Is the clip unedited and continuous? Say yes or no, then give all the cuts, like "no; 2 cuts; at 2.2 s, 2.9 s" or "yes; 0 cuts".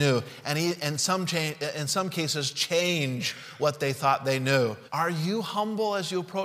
no; 1 cut; at 4.9 s